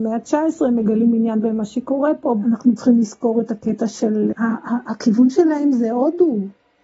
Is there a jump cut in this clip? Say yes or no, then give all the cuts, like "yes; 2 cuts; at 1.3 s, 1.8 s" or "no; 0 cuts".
yes; 1 cut; at 4.3 s